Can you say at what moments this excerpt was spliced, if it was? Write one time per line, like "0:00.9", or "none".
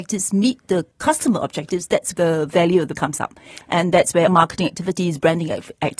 0:02.1
0:02.9
0:04.3